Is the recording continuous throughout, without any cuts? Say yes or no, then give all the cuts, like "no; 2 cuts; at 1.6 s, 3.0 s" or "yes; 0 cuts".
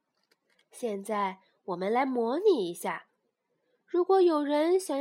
yes; 0 cuts